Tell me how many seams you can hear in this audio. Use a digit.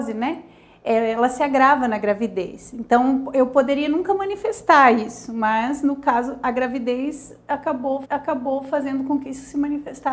1